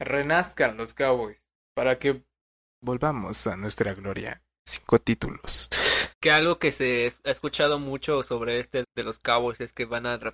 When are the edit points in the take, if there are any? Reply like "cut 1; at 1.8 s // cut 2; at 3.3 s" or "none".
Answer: cut 1; at 6.1 s // cut 2; at 8.8 s